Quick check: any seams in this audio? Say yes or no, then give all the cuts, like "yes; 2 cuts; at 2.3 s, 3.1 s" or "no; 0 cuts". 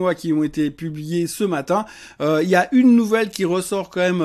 no; 0 cuts